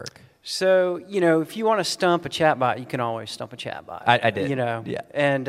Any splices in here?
no; 0 cuts

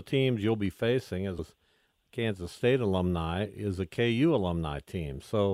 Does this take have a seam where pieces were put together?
yes; 1 cut; at 1.4 s

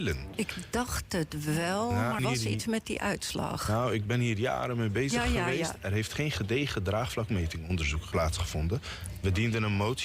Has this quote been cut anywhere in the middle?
yes; 2 cuts; at 2.2 s, 8.1 s

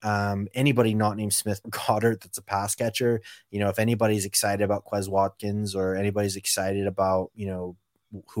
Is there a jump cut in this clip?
yes; 1 cut; at 1.6 s

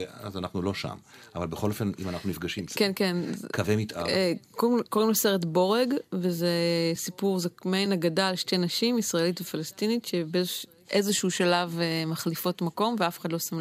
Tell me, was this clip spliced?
no; 0 cuts

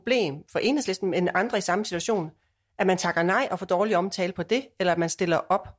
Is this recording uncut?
yes; 0 cuts

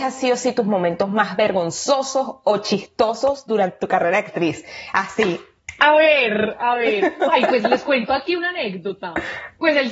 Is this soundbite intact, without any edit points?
yes; 0 cuts

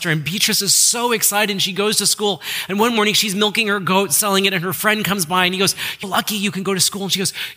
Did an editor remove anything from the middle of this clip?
yes; 1 cut; at 6.0 s

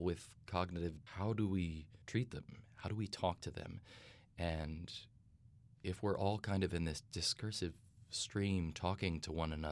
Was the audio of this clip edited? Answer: yes; 2 cuts; at 1.1 s, 2.0 s

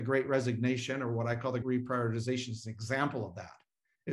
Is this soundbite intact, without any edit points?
no; 1 cut; at 1.6 s

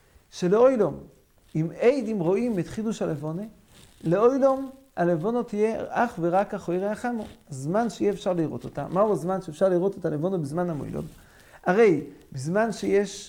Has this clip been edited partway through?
no; 0 cuts

